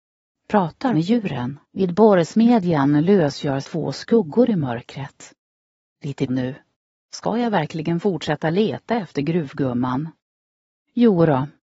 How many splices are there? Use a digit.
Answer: 4